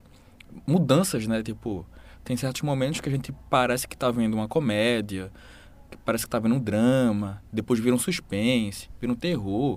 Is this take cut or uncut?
uncut